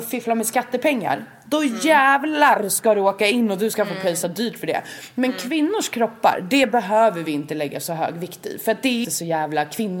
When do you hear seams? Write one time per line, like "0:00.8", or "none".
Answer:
0:09.0